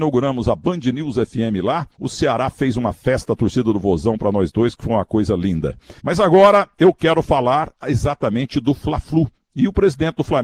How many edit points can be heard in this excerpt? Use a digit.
3